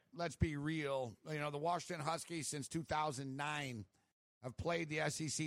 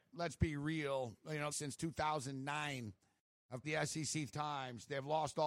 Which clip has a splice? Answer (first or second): second